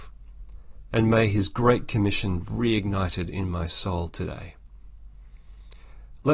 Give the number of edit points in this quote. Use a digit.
1